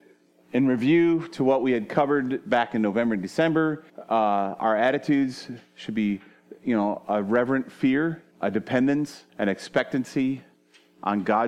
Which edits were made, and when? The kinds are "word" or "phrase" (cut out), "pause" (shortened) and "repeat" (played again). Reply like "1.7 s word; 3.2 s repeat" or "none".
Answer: 3.9 s pause; 8.3 s pause; 9.3 s pause